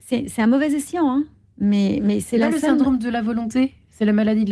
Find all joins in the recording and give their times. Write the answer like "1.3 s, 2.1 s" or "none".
none